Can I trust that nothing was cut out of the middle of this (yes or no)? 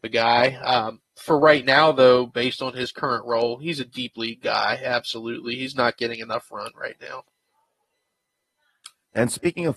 yes